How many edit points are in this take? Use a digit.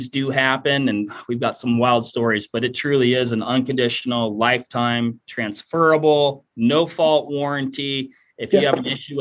1